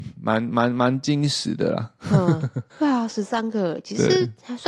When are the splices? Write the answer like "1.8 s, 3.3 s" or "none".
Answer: 2.7 s